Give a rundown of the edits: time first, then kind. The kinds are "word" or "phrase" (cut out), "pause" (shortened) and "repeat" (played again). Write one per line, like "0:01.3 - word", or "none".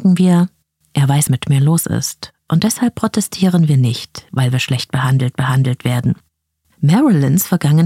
0:01.3 - word
0:05.3 - repeat